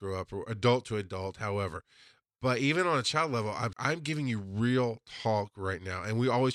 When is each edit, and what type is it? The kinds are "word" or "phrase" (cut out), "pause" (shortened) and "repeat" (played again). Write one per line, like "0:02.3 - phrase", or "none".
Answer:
0:03.7 - word